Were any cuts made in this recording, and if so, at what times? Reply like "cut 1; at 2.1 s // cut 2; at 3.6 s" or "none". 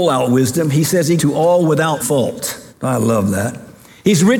cut 1; at 1.2 s // cut 2; at 2.0 s // cut 3; at 2.7 s